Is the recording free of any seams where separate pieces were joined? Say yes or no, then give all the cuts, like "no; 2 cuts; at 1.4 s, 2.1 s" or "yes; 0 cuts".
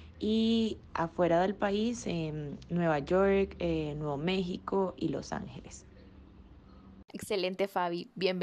yes; 0 cuts